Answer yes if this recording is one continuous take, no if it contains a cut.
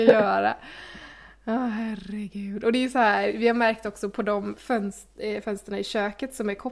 yes